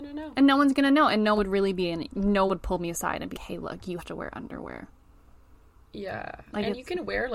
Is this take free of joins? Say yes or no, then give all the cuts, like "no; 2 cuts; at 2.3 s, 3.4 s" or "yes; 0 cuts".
no; 5 cuts; at 1.4 s, 2.1 s, 2.5 s, 3.3 s, 4.0 s